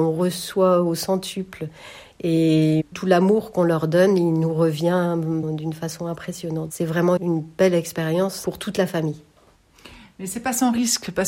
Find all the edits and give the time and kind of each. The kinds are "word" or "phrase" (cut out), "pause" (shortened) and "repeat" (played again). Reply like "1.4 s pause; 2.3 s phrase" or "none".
2.9 s word; 5.4 s word; 7.2 s word